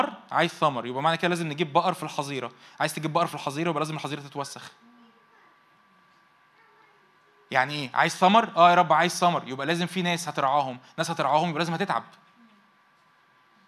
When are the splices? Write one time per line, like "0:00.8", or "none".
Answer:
none

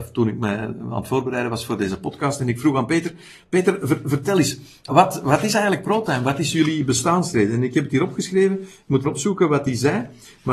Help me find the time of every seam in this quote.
0:04.9
0:09.0

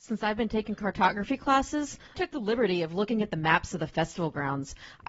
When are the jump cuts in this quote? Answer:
0:02.1

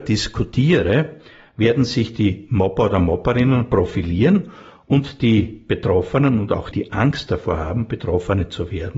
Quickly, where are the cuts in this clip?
0:06.7

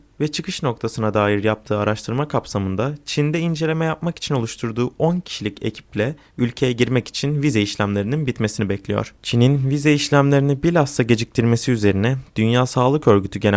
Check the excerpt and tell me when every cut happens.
0:09.2

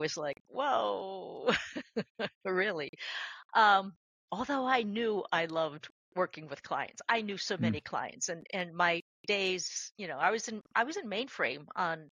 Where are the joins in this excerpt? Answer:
0:04.1

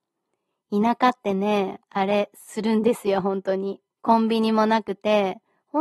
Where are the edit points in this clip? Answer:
0:03.9

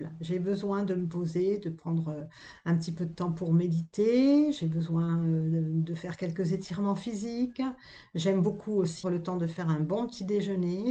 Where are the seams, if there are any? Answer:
0:09.0

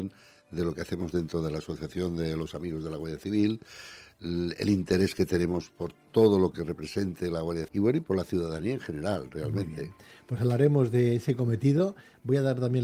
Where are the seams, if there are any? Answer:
0:01.1
0:07.7

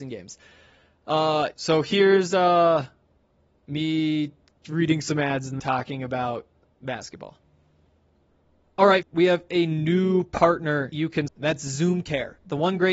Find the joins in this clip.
0:01.5
0:05.6
0:09.0
0:10.9
0:11.3

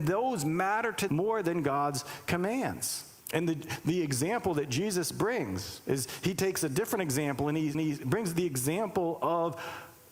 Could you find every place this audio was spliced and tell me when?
0:01.1
0:03.2
0:07.7

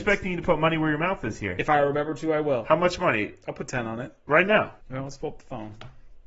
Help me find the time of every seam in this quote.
0:04.8

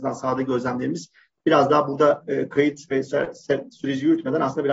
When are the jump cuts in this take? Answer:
none

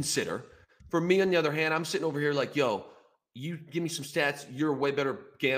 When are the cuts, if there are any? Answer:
none

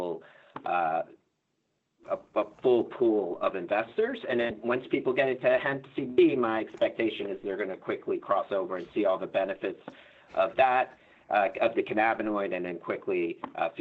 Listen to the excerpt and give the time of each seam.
none

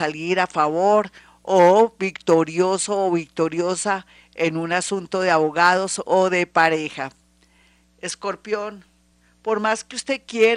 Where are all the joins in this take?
none

